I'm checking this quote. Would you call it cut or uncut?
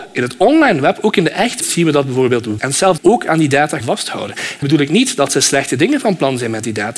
cut